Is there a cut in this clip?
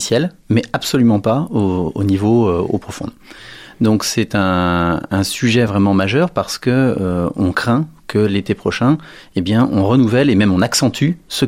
no; 0 cuts

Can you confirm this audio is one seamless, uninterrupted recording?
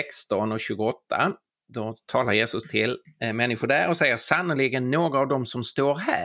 yes; 0 cuts

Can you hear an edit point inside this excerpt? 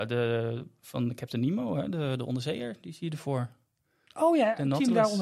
no; 0 cuts

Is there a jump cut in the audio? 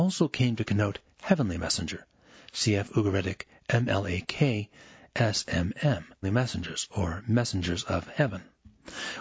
yes; 1 cut; at 6.2 s

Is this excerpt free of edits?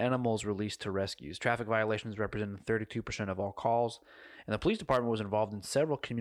yes; 0 cuts

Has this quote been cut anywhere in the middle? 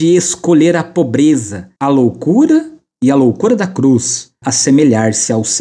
yes; 2 cuts; at 1.8 s, 4.4 s

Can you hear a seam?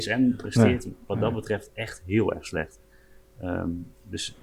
no; 0 cuts

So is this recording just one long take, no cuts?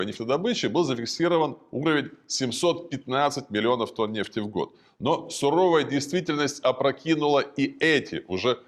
yes; 0 cuts

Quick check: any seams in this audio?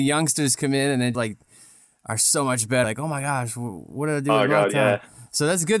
yes; 2 cuts; at 1.1 s, 2.8 s

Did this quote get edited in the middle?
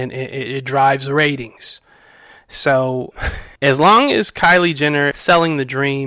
yes; 3 cuts; at 3.1 s, 3.6 s, 5.1 s

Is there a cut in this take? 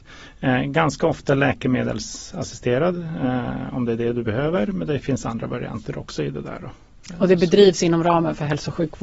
no; 0 cuts

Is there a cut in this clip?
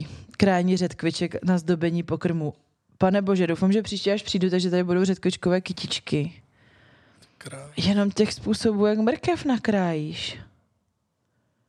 no; 0 cuts

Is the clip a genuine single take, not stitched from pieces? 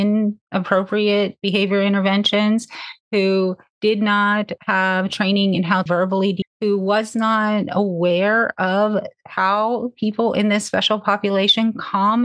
no; 2 cuts; at 5.9 s, 6.4 s

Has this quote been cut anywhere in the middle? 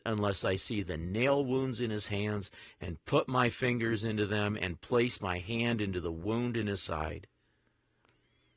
no; 0 cuts

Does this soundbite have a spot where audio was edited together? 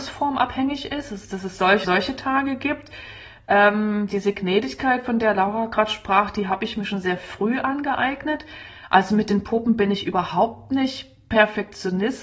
yes; 1 cut; at 1.8 s

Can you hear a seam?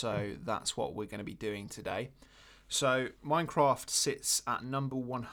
yes; 1 cut; at 3.2 s

